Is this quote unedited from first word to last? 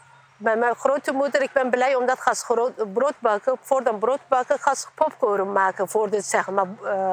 yes; 0 cuts

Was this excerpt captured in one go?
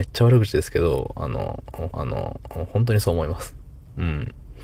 no; 1 cut; at 1.9 s

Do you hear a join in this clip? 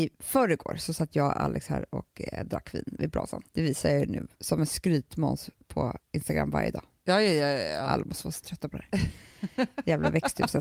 yes; 3 cuts; at 3.5 s, 4.3 s, 6.0 s

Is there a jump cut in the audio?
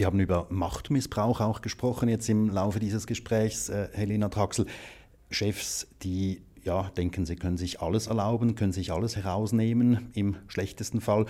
no; 0 cuts

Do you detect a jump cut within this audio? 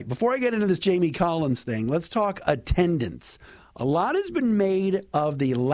no; 0 cuts

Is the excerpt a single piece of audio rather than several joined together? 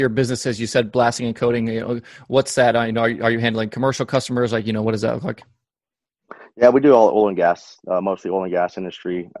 yes; 0 cuts

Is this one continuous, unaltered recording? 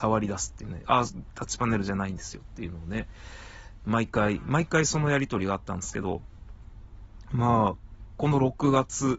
no; 1 cut; at 8.1 s

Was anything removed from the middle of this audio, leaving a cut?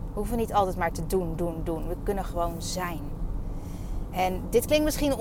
no; 0 cuts

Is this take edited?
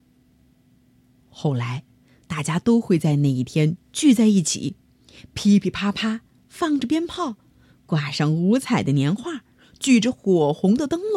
no; 0 cuts

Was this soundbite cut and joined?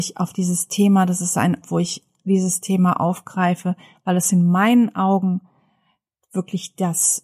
yes; 1 cut; at 1.6 s

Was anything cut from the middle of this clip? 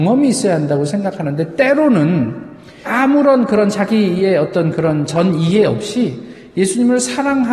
yes; 1 cut; at 2.8 s

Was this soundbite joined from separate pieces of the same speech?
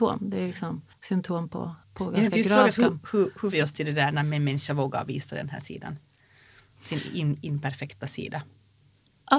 yes; 3 cuts; at 0.9 s, 1.8 s, 3.5 s

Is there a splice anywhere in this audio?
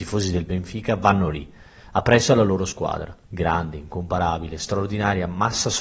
yes; 1 cut; at 3.2 s

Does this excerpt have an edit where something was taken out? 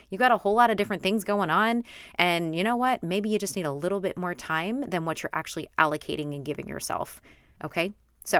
no; 0 cuts

